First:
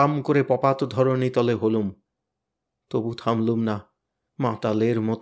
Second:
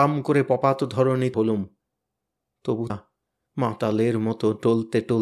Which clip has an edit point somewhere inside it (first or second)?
second